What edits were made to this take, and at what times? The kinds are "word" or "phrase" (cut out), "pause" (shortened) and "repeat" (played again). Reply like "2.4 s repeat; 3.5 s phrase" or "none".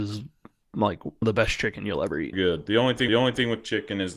1.2 s word; 2.3 s phrase; 3.1 s repeat

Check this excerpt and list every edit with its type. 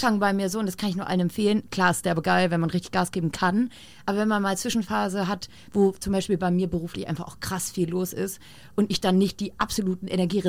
none

